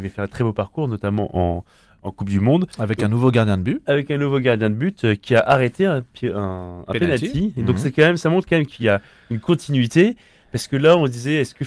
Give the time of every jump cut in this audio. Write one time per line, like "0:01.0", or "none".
none